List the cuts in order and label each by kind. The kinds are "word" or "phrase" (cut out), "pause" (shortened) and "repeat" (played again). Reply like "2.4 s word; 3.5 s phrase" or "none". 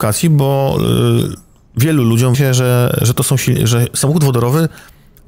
2.3 s word

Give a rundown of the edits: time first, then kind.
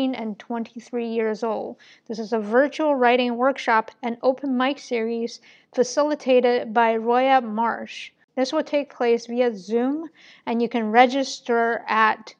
none

